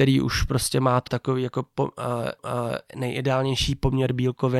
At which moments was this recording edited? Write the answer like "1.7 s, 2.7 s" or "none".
1.1 s, 2.4 s